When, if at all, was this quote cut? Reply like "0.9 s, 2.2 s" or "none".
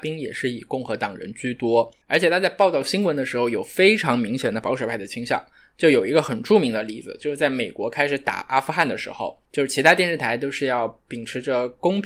none